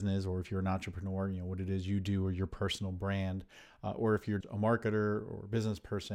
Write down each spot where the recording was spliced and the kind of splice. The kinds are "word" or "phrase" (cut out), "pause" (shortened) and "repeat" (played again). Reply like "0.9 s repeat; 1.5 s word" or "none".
4.4 s word